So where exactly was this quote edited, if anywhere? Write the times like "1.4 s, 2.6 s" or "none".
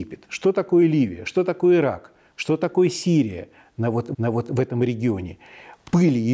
4.1 s